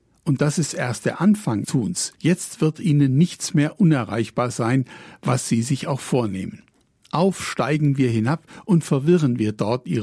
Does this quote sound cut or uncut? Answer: cut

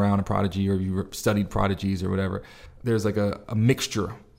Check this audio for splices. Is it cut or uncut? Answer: uncut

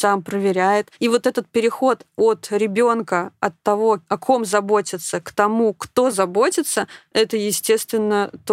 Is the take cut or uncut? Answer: uncut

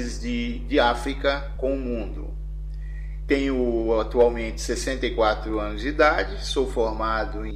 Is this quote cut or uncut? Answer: uncut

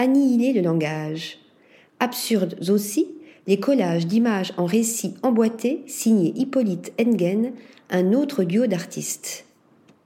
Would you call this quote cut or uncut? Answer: uncut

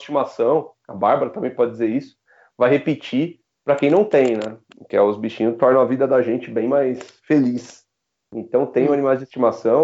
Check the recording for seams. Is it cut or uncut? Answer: uncut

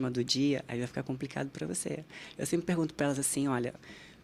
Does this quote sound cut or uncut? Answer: uncut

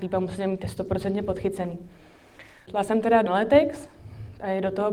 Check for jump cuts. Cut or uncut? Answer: cut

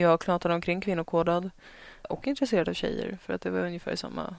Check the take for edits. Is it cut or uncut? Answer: cut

